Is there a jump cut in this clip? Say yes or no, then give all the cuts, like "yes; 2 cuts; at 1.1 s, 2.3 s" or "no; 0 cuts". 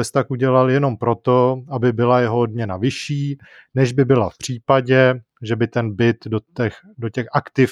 no; 0 cuts